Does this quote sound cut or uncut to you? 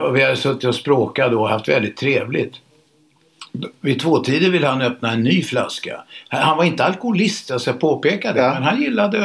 uncut